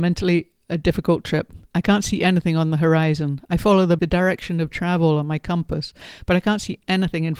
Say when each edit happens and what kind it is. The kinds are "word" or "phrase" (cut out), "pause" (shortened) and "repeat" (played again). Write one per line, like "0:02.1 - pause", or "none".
0:04.0 - word